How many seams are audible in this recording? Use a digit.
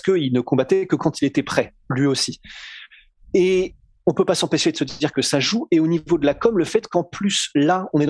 0